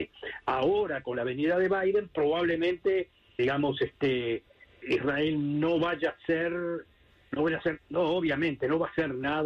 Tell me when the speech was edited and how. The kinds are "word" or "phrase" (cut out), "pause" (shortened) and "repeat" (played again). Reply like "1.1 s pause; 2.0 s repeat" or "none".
3.4 s word; 4.8 s word